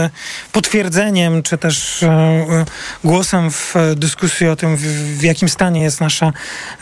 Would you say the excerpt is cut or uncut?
uncut